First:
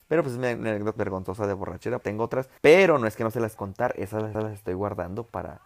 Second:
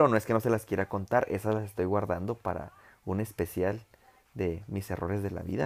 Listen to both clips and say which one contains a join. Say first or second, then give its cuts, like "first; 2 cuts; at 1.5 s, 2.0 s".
first; 5 cuts; at 1.0 s, 2.0 s, 2.6 s, 3.6 s, 4.3 s